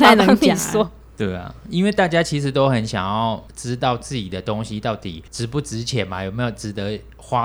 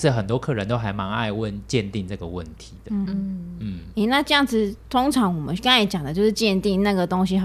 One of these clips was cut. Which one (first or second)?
second